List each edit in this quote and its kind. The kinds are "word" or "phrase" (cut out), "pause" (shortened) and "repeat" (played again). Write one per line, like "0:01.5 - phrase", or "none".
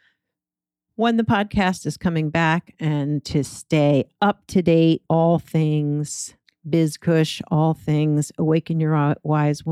0:05.1 - word
0:06.4 - pause